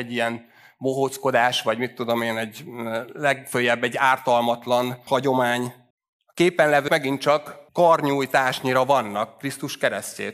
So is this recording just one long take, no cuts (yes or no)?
no